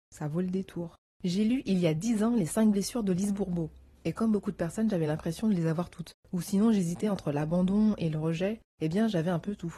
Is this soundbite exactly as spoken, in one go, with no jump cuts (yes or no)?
yes